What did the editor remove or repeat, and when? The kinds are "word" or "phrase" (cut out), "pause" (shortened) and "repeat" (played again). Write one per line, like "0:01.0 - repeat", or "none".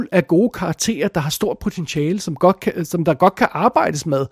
none